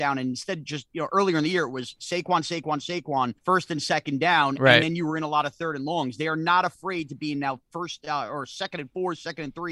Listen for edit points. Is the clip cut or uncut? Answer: cut